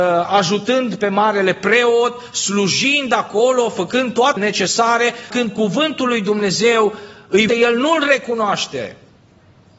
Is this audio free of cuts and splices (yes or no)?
no